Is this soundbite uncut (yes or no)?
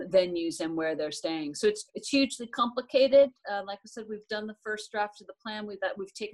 no